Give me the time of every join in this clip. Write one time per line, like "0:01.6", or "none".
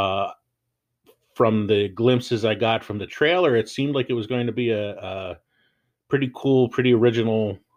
none